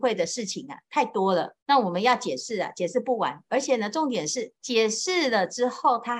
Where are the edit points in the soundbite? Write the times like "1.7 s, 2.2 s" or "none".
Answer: 1.6 s, 4.6 s